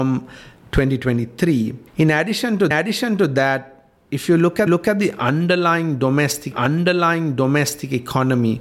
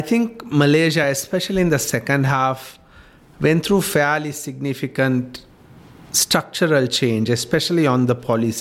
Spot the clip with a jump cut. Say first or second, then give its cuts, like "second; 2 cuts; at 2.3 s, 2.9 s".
first; 4 cuts; at 1.9 s, 2.7 s, 4.7 s, 6.5 s